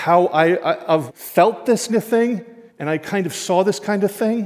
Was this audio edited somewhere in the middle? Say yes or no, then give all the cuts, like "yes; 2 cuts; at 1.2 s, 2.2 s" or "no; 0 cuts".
yes; 3 cuts; at 1.1 s, 1.9 s, 2.7 s